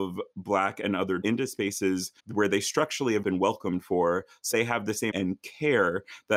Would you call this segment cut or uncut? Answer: cut